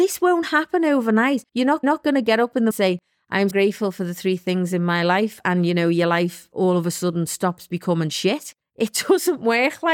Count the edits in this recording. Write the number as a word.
five